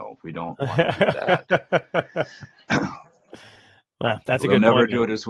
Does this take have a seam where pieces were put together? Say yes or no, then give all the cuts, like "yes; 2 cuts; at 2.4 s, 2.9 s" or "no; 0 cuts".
no; 0 cuts